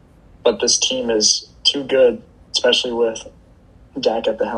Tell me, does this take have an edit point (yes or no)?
no